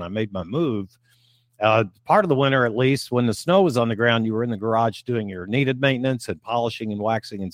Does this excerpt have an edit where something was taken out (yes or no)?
no